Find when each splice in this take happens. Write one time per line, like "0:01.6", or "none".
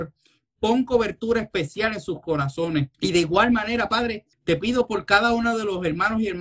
0:02.9
0:04.3